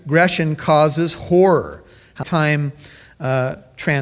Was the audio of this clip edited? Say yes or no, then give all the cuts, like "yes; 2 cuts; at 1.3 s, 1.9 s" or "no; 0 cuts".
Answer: yes; 1 cut; at 2.2 s